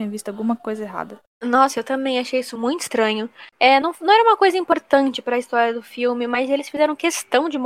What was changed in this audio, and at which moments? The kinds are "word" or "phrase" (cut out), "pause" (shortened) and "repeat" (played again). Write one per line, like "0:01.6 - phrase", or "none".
0:03.5 - pause

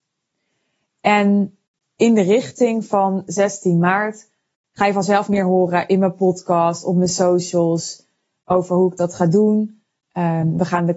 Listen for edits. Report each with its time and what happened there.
none

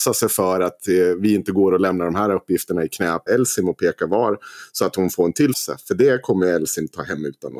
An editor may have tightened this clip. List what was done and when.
0:03.3 - word
0:05.5 - phrase

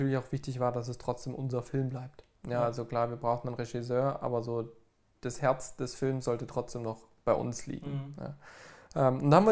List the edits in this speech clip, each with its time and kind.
none

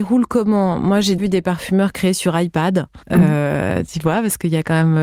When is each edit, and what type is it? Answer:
0:01.2 - word
0:03.0 - pause

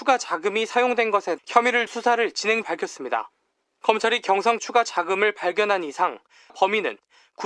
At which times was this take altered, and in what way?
0:01.4 - word
0:01.9 - word
0:02.6 - word
0:04.6 - word
0:06.5 - word

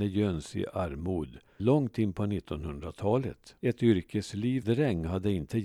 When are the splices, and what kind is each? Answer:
0:01.6 - word
0:03.6 - pause
0:04.6 - word

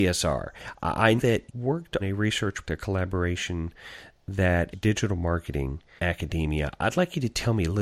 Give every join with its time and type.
0:01.2 - word
0:01.5 - word
0:02.0 - word
0:02.6 - word
0:04.7 - word
0:06.0 - word

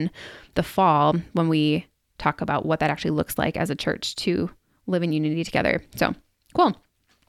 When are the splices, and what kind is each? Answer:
none

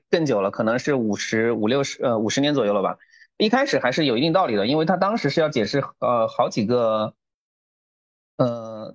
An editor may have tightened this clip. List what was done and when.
none

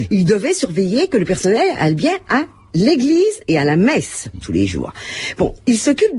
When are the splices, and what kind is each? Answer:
none

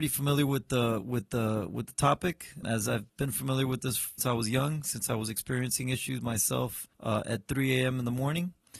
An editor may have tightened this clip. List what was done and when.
0:02.6 - word
0:03.1 - pause
0:04.2 - word
0:06.9 - pause

